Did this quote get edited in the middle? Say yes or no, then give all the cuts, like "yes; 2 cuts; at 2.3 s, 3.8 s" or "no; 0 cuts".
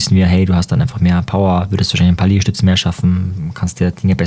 no; 0 cuts